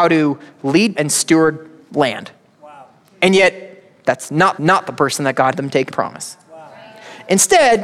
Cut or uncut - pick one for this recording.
cut